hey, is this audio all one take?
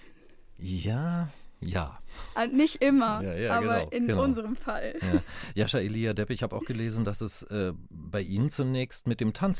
yes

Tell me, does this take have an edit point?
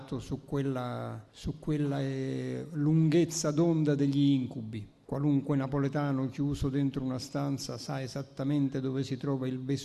yes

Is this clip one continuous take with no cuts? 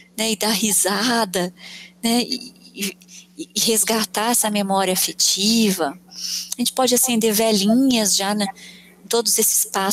yes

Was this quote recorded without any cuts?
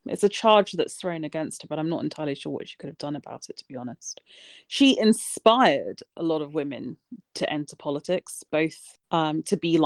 yes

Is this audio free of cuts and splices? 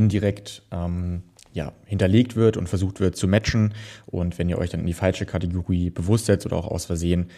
yes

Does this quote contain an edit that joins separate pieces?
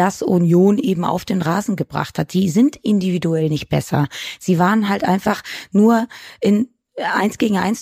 no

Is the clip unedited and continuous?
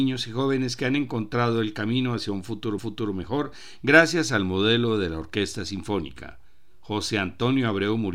no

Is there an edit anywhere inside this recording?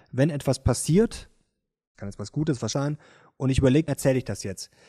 yes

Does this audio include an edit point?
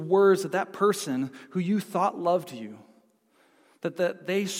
no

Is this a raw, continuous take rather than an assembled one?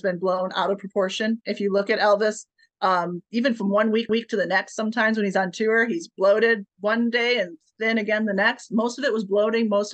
no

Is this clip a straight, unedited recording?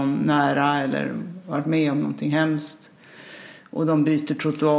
yes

